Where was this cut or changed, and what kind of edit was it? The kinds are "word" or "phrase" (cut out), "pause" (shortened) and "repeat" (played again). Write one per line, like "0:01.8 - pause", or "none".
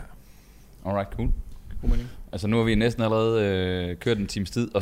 none